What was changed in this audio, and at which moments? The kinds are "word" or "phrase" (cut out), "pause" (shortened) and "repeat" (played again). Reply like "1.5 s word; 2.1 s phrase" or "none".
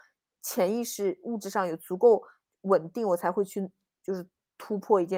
none